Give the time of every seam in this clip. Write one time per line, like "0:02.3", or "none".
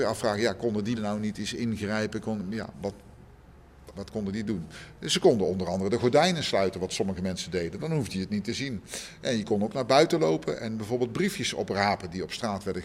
0:01.0
0:02.7
0:03.9

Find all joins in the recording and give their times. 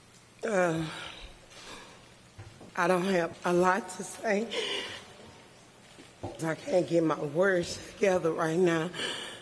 0:02.7
0:03.3
0:06.4

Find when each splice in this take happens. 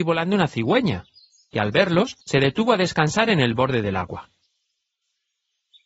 0:02.2

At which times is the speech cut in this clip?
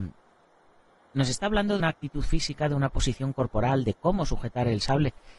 0:01.8

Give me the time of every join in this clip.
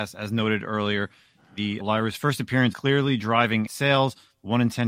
0:01.8
0:02.7
0:03.7

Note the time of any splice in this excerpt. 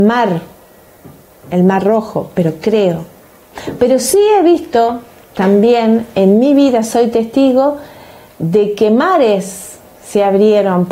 none

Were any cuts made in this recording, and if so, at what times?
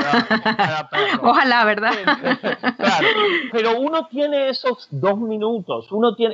0:03.5

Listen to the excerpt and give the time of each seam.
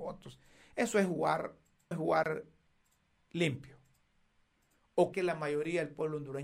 0:01.9
0:05.1

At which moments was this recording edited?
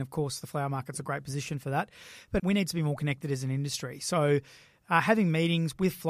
0:02.4

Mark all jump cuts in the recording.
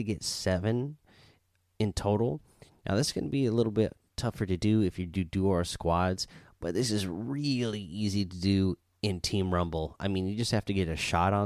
none

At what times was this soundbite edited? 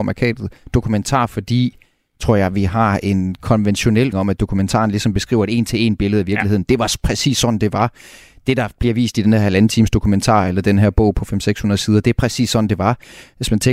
0:04.1

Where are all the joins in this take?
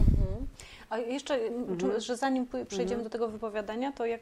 none

